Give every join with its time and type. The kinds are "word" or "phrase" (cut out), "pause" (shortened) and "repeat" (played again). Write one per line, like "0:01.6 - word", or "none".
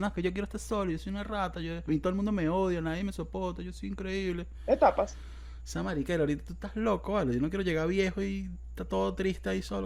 none